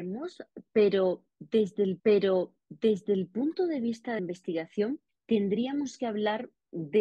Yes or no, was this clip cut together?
yes